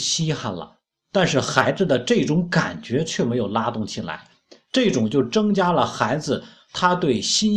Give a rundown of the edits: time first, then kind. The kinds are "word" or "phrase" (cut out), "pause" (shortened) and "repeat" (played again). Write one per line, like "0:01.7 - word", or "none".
none